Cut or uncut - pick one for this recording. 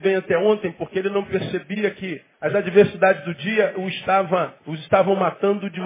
cut